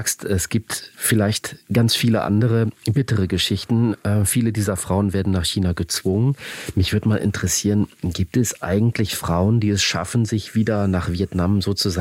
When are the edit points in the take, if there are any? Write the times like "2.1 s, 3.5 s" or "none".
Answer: none